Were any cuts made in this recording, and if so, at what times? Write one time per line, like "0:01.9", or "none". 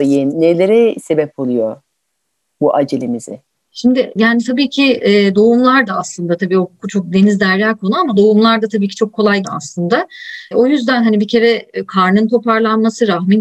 0:09.4